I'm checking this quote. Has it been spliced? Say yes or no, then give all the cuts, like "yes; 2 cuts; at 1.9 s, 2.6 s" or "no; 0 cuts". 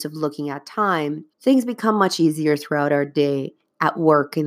yes; 1 cut; at 1.3 s